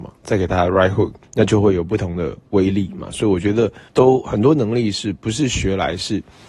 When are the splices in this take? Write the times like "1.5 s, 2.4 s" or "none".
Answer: 1.2 s, 3.9 s